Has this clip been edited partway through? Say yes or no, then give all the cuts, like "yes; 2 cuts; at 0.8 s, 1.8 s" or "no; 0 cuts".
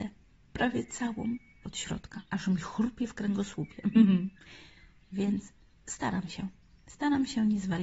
yes; 3 cuts; at 1.6 s, 2.3 s, 4.4 s